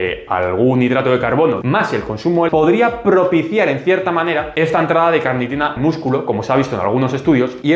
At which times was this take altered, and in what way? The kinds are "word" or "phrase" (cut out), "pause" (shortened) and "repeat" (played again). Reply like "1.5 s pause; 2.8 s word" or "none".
1.6 s phrase; 2.5 s word; 5.8 s word